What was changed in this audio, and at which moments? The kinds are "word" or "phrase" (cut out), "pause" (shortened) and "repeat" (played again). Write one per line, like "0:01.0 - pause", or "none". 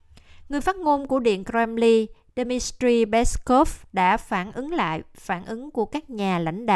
none